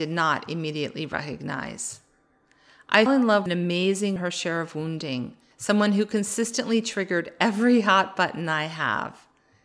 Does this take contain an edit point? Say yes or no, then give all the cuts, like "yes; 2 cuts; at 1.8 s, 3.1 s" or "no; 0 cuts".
yes; 4 cuts; at 3.1 s, 3.5 s, 4.2 s, 5.5 s